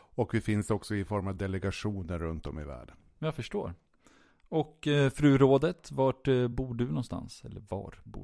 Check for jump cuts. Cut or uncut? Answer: uncut